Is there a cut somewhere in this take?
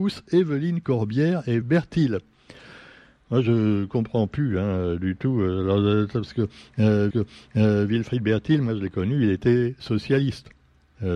yes; 2 cuts; at 1.6 s, 7.1 s

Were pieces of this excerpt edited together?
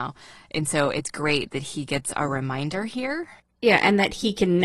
no; 0 cuts

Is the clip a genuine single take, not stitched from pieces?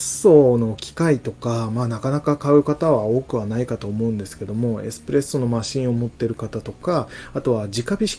yes; 0 cuts

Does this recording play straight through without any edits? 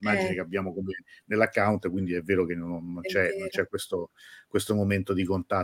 yes; 0 cuts

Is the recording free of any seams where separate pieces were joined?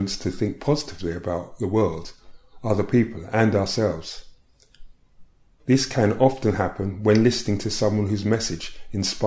yes; 0 cuts

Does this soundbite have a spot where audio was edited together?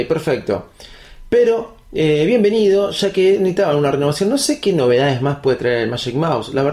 no; 0 cuts

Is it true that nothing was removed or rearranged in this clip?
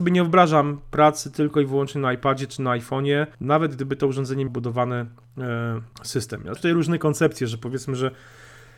no; 4 cuts; at 3.3 s, 4.5 s, 5.9 s, 6.5 s

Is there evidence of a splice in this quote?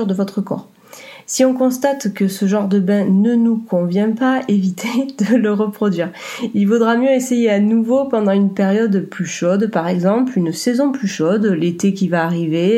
no; 0 cuts

